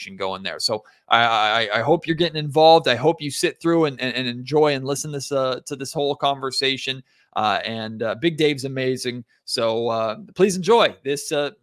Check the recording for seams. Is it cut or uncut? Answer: uncut